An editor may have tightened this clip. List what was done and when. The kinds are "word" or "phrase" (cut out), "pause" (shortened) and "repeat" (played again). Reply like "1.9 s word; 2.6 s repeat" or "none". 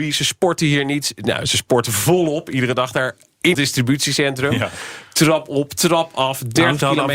3.5 s word